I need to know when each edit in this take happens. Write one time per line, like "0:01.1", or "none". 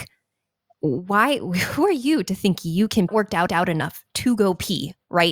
0:03.1
0:03.5